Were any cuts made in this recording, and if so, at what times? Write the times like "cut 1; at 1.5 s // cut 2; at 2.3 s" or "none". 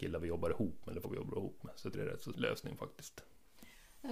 cut 1; at 1.0 s // cut 2; at 1.9 s // cut 3; at 2.3 s

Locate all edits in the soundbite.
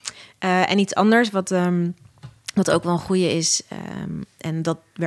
none

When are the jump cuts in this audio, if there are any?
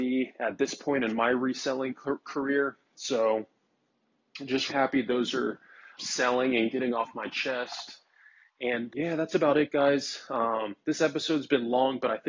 cut 1; at 4.7 s // cut 2; at 6.0 s // cut 3; at 8.9 s

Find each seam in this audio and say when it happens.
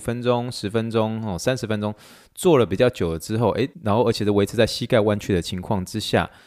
cut 1; at 3.7 s

